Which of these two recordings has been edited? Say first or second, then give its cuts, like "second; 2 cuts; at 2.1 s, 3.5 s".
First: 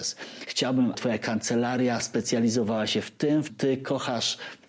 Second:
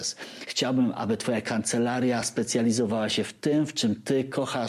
first; 2 cuts; at 0.9 s, 3.5 s